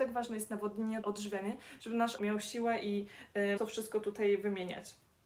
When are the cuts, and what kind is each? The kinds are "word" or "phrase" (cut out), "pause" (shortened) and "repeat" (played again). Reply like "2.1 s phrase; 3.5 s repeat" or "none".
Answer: 1.0 s word; 2.2 s word; 3.6 s word